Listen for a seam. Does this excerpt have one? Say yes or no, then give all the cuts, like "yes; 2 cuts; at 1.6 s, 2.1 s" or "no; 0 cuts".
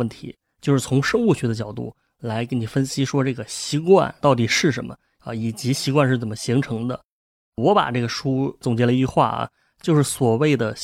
no; 0 cuts